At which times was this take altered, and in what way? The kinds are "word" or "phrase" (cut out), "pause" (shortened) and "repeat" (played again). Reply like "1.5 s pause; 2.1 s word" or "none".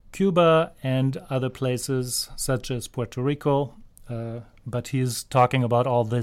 none